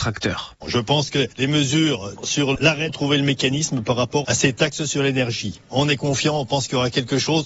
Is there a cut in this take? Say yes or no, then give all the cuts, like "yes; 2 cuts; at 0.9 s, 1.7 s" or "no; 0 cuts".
yes; 2 cuts; at 2.9 s, 4.2 s